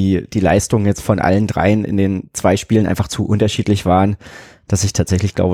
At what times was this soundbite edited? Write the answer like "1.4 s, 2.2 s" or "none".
none